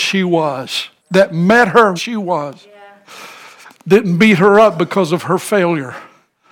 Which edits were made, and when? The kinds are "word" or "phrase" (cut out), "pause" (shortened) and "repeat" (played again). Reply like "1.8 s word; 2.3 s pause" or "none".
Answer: 1.0 s pause; 2.0 s word